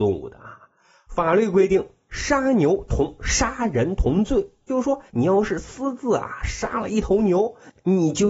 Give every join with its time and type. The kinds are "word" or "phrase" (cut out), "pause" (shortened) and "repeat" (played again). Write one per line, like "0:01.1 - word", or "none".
0:04.7 - word
0:05.1 - pause

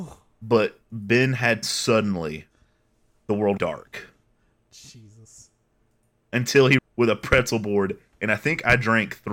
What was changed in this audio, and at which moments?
0:01.6 - phrase
0:03.6 - word
0:06.8 - word

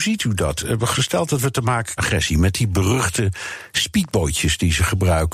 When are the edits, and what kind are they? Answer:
0:02.0 - phrase

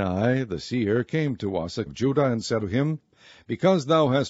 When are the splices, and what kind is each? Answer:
0:01.9 - word
0:02.6 - word

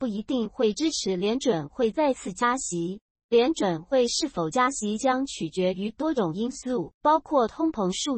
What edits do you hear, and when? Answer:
0:07.0 - pause

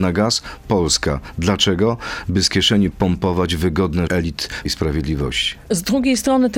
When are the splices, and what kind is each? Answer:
0:02.9 - word
0:04.1 - word
0:04.7 - word

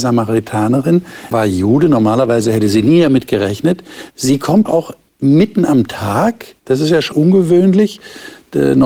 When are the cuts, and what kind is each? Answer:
0:01.3 - word
0:04.1 - pause
0:04.7 - word
0:05.1 - pause
0:06.6 - pause
0:07.1 - word

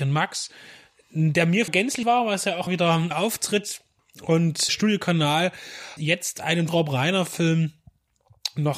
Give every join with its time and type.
0:01.7 - word
0:02.0 - word
0:02.7 - word
0:03.1 - word
0:04.7 - word
0:06.0 - word
0:06.7 - word

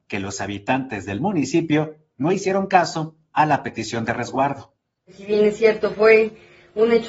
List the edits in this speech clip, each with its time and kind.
none

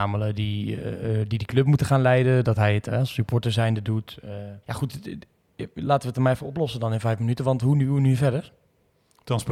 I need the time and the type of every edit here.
0:04.6 - pause

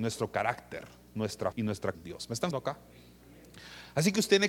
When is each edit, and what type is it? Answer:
0:01.5 - word
0:01.9 - word
0:02.5 - word

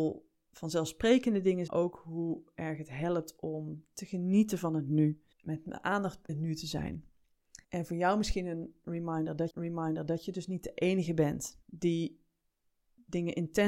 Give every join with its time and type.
0:01.7 - phrase
0:05.3 - pause
0:06.3 - word
0:07.6 - pause
0:09.5 - repeat
0:11.6 - pause

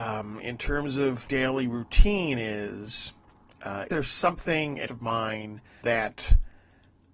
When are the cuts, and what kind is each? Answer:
0:01.3 - word
0:03.9 - word
0:04.9 - word
0:05.8 - word

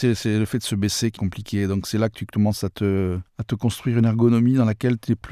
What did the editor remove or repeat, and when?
0:01.2 - word
0:03.3 - pause

